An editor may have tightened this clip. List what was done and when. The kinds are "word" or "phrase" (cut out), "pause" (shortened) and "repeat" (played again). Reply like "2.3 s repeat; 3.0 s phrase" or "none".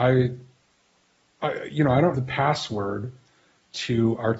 2.1 s word